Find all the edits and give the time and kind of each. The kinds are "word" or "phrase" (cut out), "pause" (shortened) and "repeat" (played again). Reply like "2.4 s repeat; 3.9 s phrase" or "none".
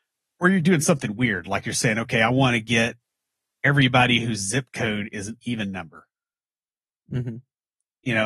none